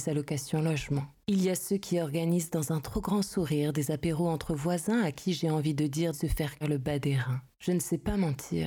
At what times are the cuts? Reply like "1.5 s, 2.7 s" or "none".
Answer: 6.1 s, 6.6 s